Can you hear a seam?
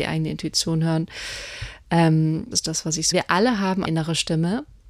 yes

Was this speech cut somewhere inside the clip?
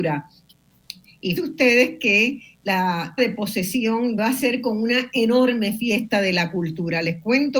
yes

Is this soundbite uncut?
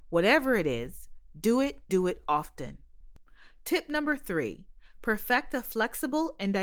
no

